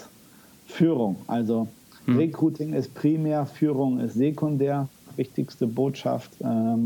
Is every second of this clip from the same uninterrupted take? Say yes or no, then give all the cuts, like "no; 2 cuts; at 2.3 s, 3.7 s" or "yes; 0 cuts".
yes; 0 cuts